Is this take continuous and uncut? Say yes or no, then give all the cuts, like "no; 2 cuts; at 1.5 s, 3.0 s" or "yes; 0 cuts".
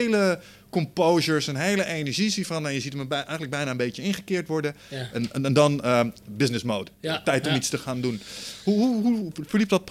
no; 1 cut; at 6.9 s